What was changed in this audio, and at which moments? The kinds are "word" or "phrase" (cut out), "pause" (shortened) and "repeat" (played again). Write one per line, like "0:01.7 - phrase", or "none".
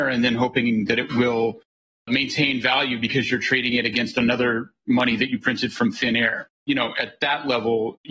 none